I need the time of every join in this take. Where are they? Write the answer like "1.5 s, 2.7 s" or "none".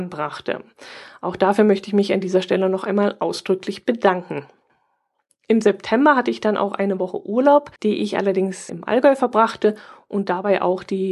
7.8 s, 8.7 s